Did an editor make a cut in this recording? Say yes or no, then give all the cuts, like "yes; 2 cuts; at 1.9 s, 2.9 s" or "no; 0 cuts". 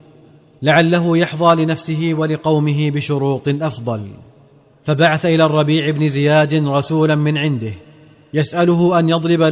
no; 0 cuts